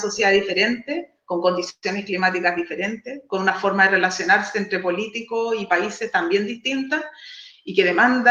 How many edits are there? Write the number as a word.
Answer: zero